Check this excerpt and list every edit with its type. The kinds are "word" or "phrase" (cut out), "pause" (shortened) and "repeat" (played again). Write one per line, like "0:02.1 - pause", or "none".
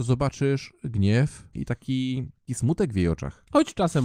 0:01.5 - word
0:02.5 - word

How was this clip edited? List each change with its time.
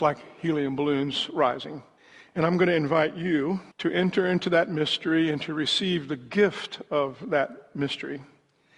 0:02.0 - pause
0:03.7 - pause

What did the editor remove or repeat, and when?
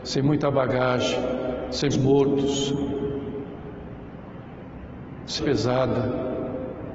0:01.9 - word
0:05.4 - word

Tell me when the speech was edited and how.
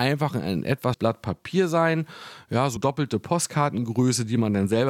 0:00.9 - word
0:02.8 - word

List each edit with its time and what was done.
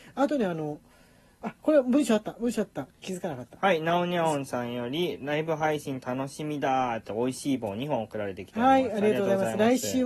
none

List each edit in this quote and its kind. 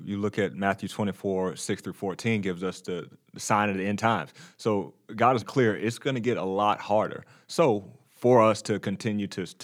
0:05.4 - word

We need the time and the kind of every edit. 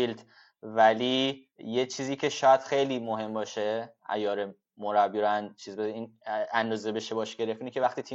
0:01.5 - pause

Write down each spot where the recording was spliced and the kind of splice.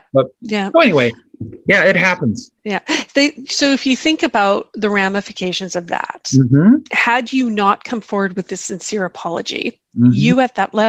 0:02.6 - pause

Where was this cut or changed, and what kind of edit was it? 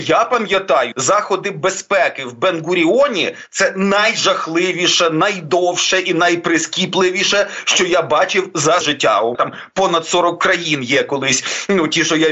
0:00.9 - word
0:08.8 - word
0:09.3 - word

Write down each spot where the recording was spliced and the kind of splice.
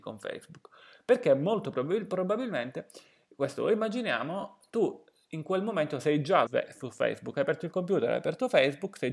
0:06.5 - phrase

